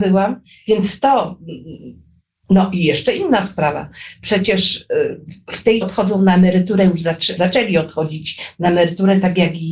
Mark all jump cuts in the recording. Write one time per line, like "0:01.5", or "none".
0:05.8
0:07.4